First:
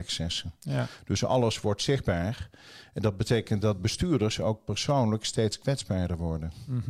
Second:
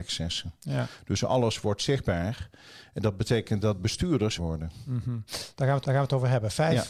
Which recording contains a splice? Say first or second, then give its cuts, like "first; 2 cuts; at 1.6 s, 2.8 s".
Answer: second; 2 cuts; at 4.4 s, 5.8 s